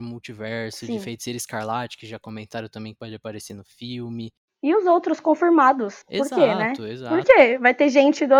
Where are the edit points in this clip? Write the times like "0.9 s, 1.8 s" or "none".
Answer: 6.0 s